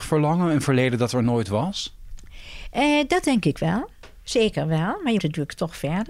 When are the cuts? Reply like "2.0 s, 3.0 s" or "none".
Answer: 5.2 s